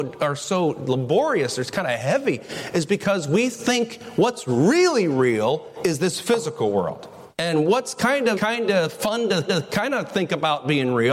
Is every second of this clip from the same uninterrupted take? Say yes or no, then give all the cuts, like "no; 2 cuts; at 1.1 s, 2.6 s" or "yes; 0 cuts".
no; 3 cuts; at 7.3 s, 8.3 s, 9.5 s